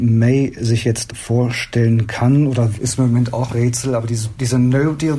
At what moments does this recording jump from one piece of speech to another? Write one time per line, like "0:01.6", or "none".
0:01.1
0:02.8
0:03.5